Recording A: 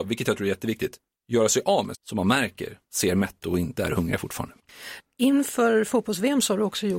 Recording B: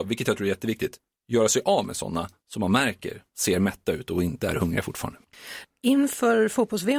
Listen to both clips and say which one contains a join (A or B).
A